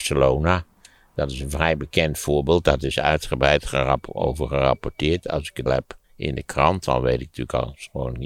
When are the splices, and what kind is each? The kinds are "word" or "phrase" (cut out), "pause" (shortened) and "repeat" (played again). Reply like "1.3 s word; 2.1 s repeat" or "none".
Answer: 5.7 s word; 6.0 s pause

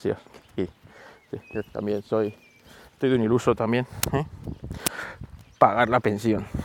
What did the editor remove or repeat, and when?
none

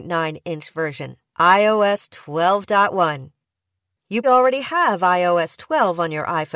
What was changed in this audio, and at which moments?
1.3 s pause; 4.2 s word

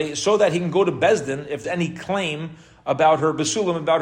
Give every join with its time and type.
1.6 s word

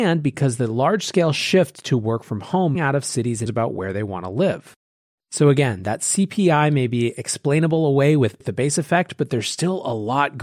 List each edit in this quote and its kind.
2.7 s phrase; 3.5 s phrase

